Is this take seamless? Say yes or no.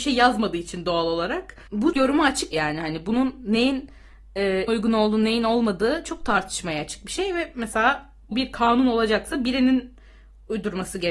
no